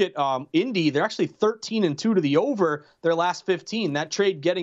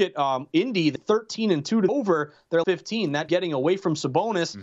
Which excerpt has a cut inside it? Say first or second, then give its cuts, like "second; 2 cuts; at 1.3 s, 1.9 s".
second; 4 cuts; at 1.0 s, 1.9 s, 2.6 s, 3.3 s